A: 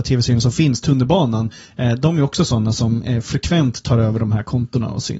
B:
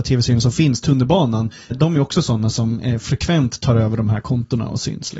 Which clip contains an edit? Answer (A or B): B